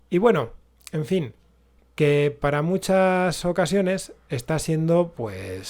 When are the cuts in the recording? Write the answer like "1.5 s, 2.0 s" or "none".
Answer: none

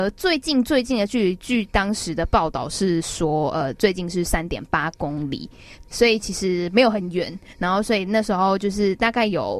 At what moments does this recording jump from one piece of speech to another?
5.9 s

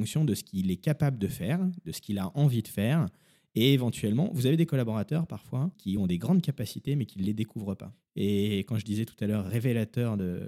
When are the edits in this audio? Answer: none

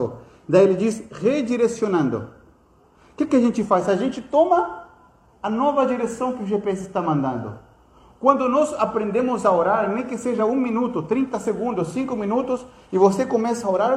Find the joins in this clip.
none

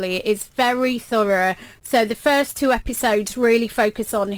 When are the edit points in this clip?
none

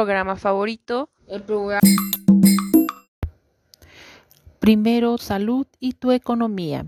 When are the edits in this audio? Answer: 1.2 s, 5.2 s

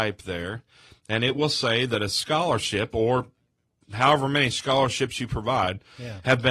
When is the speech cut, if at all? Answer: none

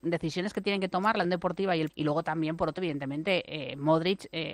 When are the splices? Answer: 1.2 s, 1.9 s, 2.8 s

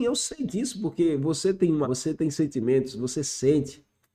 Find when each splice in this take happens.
1.8 s

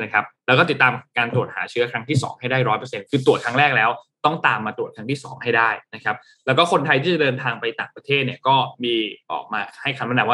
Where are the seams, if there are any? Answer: none

